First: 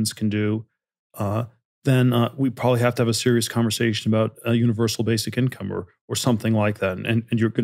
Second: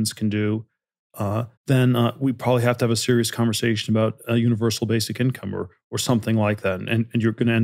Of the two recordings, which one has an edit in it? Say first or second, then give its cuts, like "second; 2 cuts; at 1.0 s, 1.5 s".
second; 1 cut; at 1.6 s